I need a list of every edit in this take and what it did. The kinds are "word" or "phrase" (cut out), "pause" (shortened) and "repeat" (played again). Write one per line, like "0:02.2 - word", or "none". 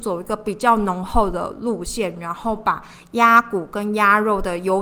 none